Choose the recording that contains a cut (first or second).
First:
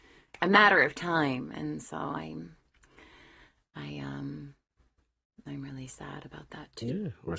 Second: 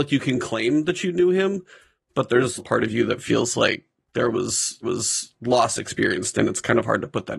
second